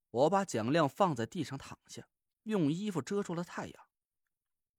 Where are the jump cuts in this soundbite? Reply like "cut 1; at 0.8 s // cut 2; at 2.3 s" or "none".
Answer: none